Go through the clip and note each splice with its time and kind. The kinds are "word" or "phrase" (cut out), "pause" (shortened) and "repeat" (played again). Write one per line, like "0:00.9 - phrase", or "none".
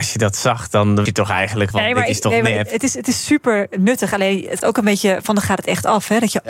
0:01.1 - word
0:01.7 - word
0:04.6 - word
0:05.4 - word